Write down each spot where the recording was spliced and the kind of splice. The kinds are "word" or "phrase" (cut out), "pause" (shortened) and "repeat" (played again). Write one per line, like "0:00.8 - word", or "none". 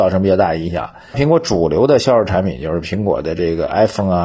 0:01.1 - phrase